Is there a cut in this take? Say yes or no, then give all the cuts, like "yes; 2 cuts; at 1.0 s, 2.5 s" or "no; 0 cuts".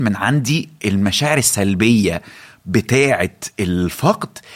no; 0 cuts